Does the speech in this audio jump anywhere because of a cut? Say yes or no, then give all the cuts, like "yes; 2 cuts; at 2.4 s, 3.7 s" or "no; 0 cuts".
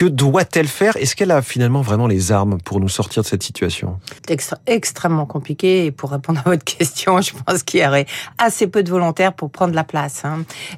yes; 1 cut; at 4.2 s